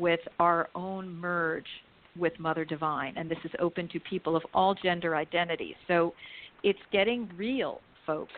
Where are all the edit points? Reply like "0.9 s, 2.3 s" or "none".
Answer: none